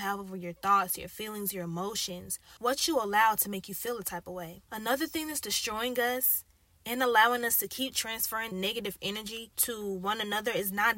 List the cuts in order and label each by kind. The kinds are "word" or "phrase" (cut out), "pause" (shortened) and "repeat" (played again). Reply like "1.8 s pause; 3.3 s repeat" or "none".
8.5 s word